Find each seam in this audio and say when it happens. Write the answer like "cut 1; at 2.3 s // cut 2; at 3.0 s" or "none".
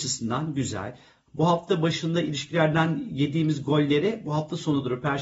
none